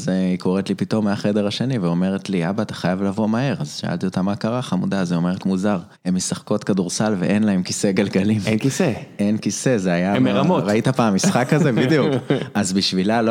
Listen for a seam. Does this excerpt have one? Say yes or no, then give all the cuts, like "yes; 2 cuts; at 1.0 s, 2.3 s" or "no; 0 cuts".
yes; 2 cuts; at 5.4 s, 5.9 s